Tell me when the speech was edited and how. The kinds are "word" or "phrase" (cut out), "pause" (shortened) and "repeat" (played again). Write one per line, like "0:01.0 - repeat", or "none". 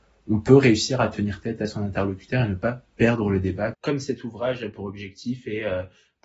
none